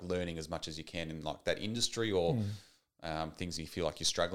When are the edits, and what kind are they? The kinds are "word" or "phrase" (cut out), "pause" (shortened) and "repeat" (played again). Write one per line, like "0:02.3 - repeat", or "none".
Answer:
none